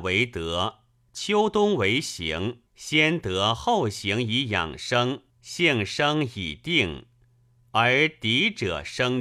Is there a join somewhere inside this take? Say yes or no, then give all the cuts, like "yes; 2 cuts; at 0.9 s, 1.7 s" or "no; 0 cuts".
yes; 2 cuts; at 2.7 s, 5.3 s